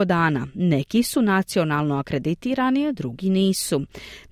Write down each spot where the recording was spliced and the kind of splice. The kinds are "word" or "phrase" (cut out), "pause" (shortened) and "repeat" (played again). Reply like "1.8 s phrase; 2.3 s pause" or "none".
none